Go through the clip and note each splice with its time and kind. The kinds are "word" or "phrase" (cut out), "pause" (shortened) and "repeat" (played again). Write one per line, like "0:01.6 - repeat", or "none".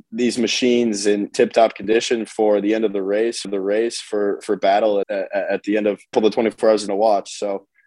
0:01.3 - word
0:03.4 - repeat
0:05.0 - word
0:06.1 - phrase
0:06.9 - phrase